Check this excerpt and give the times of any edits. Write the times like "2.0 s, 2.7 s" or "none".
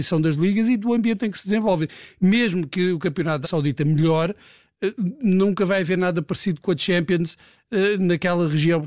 3.4 s